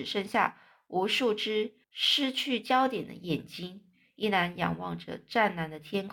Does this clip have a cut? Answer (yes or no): yes